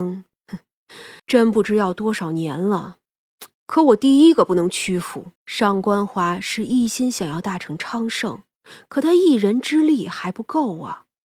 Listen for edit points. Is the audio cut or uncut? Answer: cut